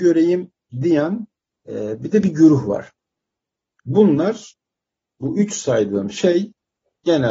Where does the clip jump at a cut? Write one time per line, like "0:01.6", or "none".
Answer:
0:01.5